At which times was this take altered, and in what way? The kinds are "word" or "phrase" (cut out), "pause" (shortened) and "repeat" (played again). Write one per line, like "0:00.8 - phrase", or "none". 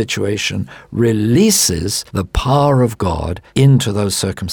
0:02.1 - pause
0:03.5 - pause